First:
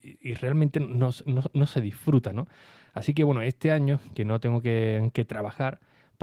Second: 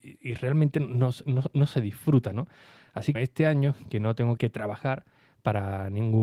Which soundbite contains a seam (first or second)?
second